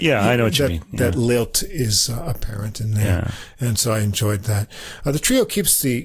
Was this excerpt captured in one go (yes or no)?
yes